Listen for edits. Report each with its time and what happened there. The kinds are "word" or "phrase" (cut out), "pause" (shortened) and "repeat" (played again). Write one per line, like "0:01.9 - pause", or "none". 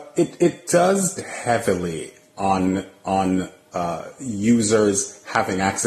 0:01.2 - word